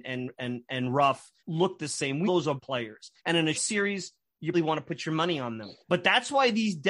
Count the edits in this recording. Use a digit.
7